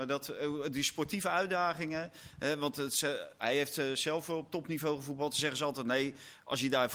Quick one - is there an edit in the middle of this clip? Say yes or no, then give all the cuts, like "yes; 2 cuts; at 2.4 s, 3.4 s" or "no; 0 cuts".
no; 0 cuts